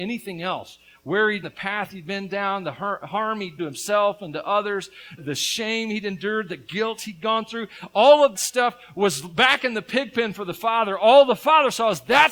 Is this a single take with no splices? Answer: no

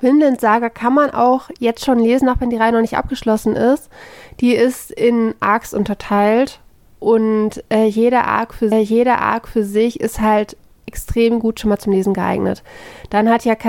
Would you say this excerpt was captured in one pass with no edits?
no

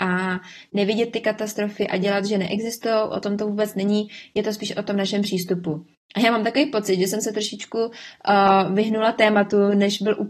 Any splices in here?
no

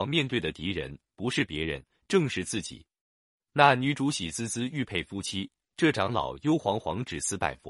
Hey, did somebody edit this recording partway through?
no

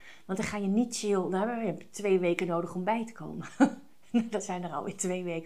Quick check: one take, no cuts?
yes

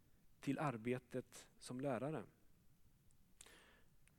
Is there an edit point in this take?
yes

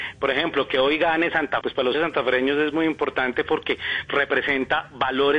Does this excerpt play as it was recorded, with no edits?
no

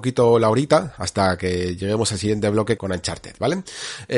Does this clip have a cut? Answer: yes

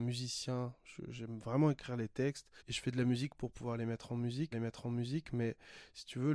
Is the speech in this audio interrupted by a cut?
yes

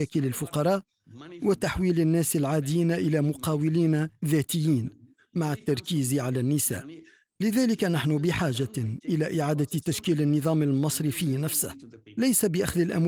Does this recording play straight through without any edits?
yes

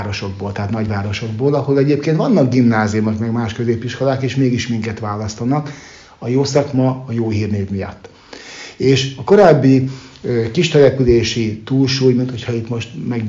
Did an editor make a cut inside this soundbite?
no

